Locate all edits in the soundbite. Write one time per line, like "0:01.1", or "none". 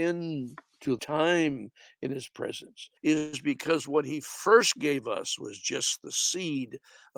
0:01.0
0:03.0